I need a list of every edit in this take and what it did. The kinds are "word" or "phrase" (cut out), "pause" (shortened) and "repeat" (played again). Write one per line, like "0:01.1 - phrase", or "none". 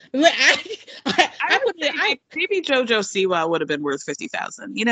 none